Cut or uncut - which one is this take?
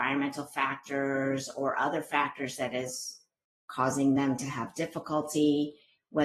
uncut